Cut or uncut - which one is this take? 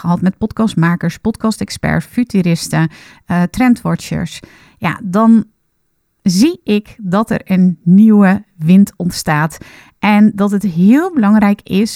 uncut